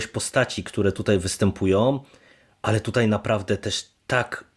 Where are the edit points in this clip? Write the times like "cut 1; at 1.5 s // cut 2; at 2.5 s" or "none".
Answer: none